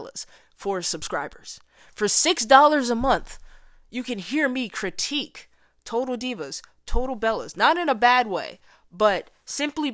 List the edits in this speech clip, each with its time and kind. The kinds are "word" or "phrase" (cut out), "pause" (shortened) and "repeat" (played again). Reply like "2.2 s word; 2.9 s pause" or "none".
none